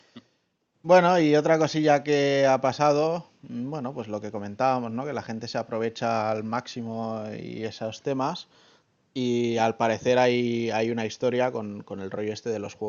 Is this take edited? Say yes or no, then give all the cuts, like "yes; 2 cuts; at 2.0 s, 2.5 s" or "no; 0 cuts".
no; 0 cuts